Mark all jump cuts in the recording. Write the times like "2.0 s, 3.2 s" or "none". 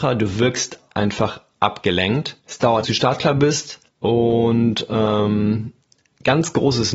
2.4 s, 2.8 s, 3.9 s